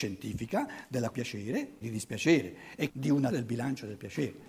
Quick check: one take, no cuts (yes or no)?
no